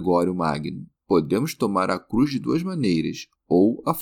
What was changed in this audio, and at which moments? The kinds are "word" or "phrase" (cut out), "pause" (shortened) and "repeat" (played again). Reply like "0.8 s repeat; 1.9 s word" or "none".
1.0 s pause